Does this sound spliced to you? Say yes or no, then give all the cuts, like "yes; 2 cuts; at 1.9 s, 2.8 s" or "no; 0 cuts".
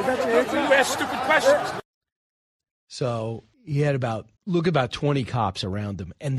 yes; 2 cuts; at 3.5 s, 4.4 s